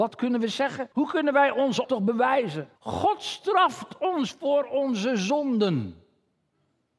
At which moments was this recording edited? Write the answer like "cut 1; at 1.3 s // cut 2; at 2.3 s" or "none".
cut 1; at 0.9 s // cut 2; at 1.8 s // cut 3; at 2.8 s